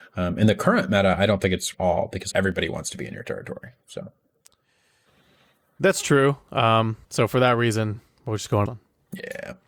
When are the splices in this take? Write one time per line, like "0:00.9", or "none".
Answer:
0:01.7
0:02.3
0:03.8
0:07.0
0:08.7